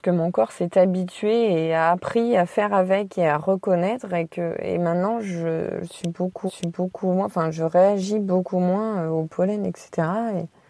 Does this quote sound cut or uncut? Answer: cut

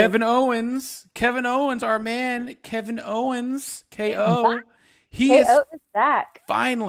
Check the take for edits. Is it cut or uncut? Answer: uncut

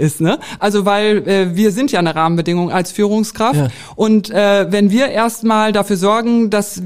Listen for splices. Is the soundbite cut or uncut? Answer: uncut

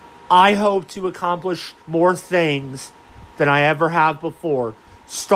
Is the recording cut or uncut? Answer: cut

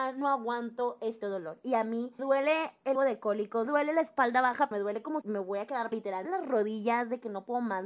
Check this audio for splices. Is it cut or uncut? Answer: cut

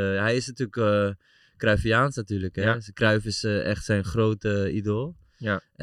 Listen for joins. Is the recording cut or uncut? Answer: uncut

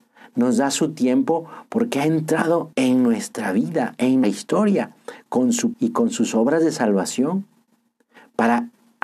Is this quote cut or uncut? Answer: cut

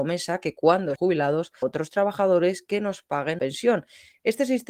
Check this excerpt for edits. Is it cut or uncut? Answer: cut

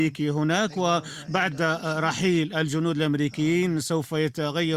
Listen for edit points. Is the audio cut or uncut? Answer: uncut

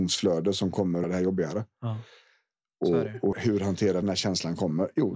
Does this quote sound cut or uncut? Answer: cut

